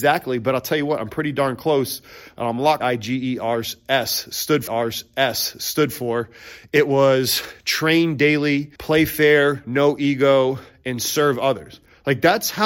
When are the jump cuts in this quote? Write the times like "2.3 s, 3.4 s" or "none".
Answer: 2.8 s, 4.7 s, 8.8 s